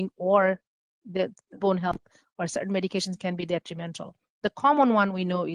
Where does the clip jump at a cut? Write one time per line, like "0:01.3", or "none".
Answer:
0:01.6